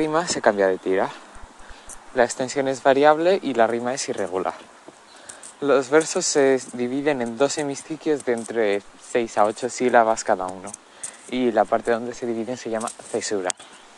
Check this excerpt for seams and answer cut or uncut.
uncut